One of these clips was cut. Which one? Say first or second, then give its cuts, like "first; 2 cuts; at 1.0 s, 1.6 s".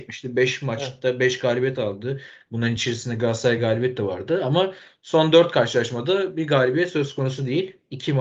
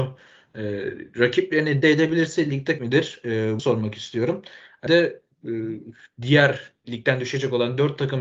second; 5 cuts; at 1.8 s, 2.8 s, 3.6 s, 4.9 s, 6.8 s